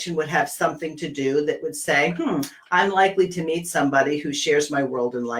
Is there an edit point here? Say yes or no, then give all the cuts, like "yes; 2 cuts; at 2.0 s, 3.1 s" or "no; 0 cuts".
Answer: no; 0 cuts